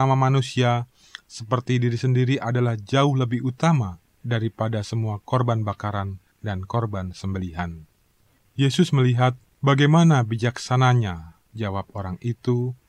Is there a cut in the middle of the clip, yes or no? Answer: no